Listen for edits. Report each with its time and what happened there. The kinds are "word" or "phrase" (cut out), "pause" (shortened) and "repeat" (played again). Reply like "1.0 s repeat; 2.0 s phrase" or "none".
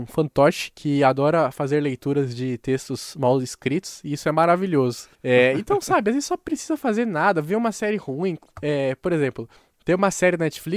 5.1 s pause; 9.6 s pause